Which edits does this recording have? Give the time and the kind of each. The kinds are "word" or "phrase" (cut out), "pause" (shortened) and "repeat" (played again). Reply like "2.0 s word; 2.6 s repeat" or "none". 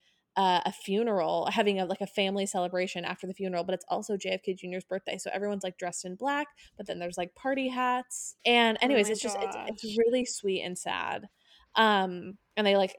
8.4 s pause